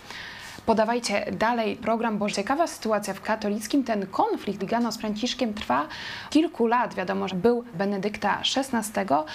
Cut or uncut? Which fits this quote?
cut